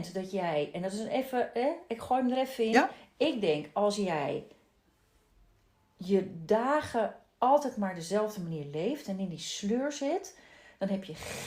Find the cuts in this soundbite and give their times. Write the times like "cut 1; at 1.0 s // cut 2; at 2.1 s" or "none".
none

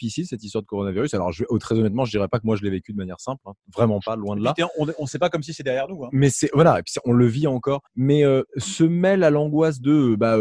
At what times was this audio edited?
cut 1; at 7.9 s // cut 2; at 8.5 s

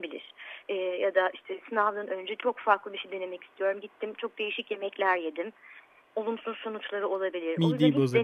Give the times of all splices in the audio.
none

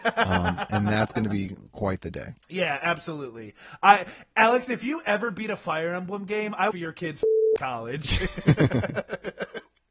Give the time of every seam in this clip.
cut 1; at 2.4 s // cut 2; at 6.7 s

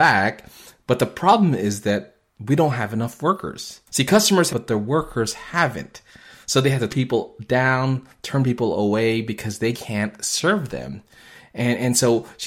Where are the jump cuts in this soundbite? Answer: cut 1; at 3.9 s // cut 2; at 4.5 s // cut 3; at 6.9 s // cut 4; at 9.7 s

